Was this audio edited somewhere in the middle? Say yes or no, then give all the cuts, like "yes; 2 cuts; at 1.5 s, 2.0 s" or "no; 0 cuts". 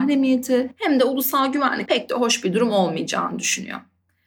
yes; 1 cut; at 1.9 s